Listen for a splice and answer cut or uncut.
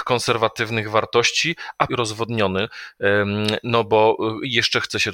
cut